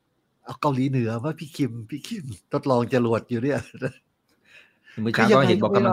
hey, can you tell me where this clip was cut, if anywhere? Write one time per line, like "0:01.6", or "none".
0:02.4